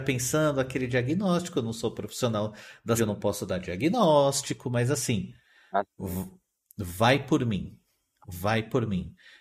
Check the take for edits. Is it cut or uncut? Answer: cut